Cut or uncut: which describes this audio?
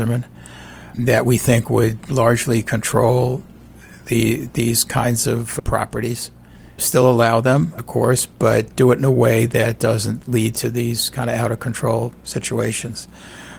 uncut